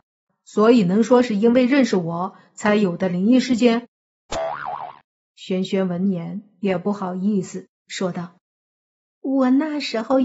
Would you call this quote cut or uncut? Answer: cut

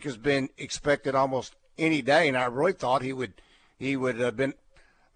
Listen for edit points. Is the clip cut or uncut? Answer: uncut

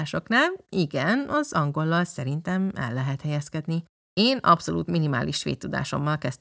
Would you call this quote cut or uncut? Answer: uncut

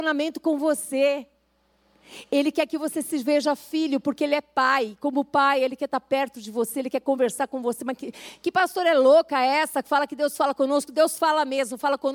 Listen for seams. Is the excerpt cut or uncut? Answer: uncut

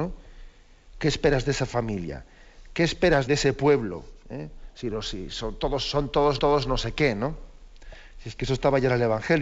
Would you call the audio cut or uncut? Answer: cut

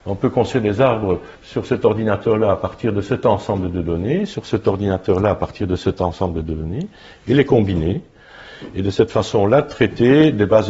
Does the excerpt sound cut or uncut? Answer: cut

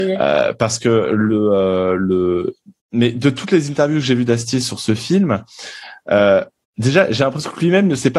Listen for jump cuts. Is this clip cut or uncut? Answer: uncut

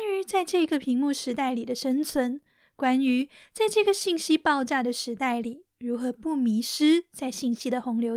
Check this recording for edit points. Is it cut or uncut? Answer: uncut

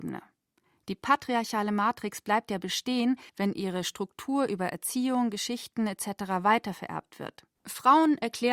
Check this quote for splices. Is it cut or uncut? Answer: cut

